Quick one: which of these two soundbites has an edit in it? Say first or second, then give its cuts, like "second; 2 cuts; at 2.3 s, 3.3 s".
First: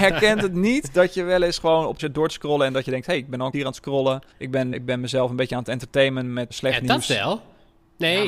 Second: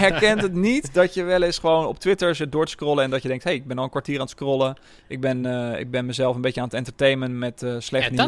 first; 5 cuts; at 2.0 s, 3.5 s, 4.3 s, 4.7 s, 6.5 s